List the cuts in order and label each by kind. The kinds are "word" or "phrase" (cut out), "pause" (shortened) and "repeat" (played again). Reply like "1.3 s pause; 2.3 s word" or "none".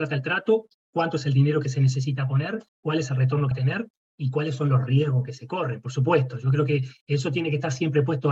2.7 s pause; 3.5 s word